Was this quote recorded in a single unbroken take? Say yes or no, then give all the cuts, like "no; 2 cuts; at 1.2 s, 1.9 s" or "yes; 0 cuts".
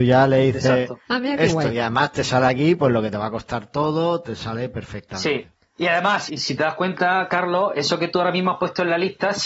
no; 2 cuts; at 5.5 s, 6.3 s